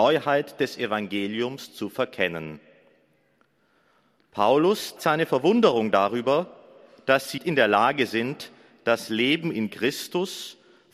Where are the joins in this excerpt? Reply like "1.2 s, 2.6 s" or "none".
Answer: 5.0 s, 7.4 s